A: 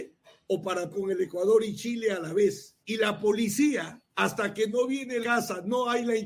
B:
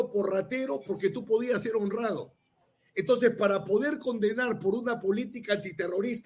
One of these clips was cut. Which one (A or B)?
A